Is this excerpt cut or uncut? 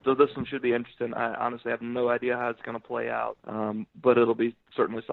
cut